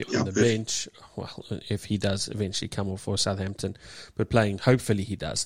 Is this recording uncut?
yes; 0 cuts

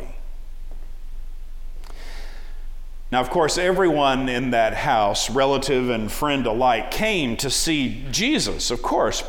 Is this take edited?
no; 0 cuts

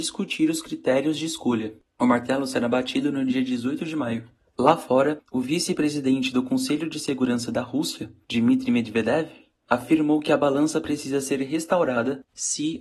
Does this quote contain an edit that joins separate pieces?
no; 0 cuts

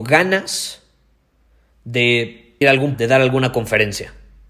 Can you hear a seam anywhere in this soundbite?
yes; 2 cuts; at 2.6 s, 2.9 s

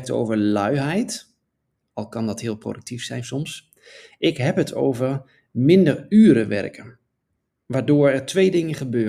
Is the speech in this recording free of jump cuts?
yes; 0 cuts

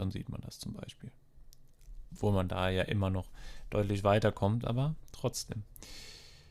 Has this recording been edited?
no; 0 cuts

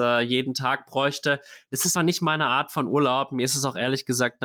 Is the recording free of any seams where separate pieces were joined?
no; 1 cut; at 2.0 s

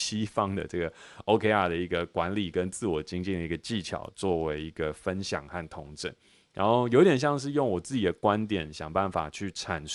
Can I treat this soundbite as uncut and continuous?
yes; 0 cuts

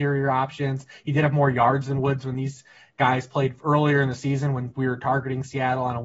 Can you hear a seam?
no; 0 cuts

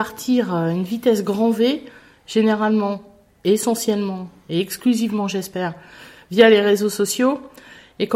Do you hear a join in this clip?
no; 0 cuts

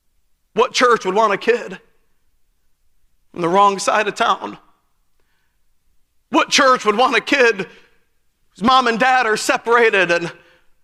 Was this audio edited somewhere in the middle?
no; 0 cuts

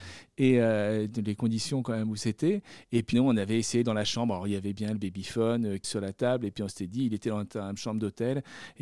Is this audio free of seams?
no; 3 cuts; at 3.1 s, 3.8 s, 5.8 s

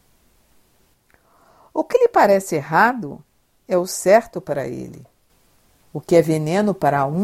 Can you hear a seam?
no; 0 cuts

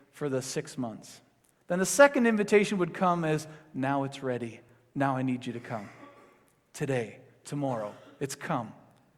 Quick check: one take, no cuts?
yes; 0 cuts

